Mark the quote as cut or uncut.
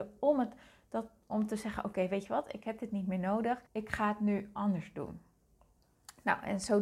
cut